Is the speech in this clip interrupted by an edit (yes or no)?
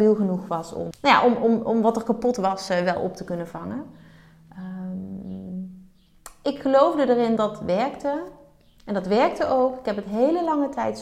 yes